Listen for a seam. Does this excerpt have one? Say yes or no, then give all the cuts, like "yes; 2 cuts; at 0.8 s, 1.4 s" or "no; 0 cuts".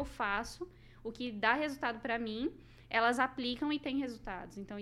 no; 0 cuts